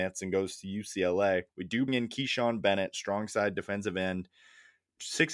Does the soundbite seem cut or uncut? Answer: cut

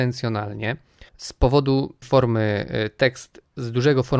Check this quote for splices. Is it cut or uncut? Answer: cut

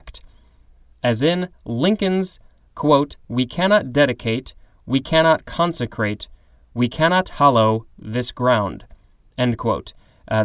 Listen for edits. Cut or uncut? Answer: uncut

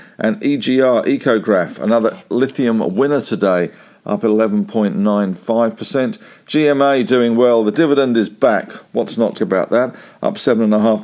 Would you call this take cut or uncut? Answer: cut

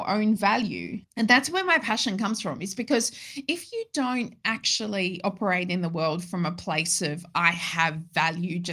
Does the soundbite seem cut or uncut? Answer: uncut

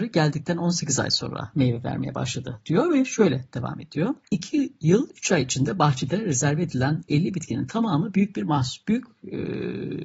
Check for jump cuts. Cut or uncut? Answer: cut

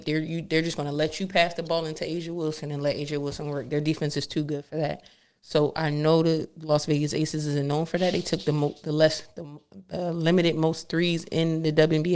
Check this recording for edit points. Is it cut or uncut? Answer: uncut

